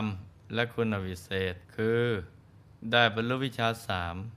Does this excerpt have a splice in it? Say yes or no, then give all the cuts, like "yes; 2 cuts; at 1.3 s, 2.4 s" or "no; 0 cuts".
yes; 1 cut; at 1.6 s